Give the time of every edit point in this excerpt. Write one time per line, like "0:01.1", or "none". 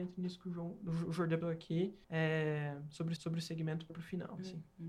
0:01.4
0:02.0
0:03.2
0:03.9